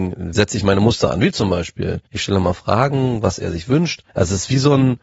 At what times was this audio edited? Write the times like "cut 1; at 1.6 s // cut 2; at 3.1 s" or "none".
cut 1; at 2.1 s // cut 2; at 4.1 s